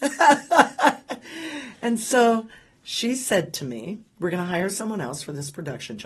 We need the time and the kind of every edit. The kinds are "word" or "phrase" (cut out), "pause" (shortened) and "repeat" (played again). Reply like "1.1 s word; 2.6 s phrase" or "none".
none